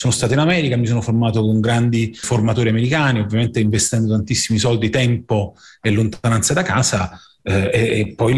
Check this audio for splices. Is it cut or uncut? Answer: uncut